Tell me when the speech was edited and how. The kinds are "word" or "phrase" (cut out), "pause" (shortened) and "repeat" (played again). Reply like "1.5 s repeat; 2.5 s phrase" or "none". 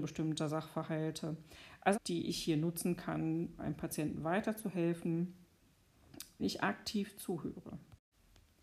1.9 s phrase; 3.6 s word; 6.4 s word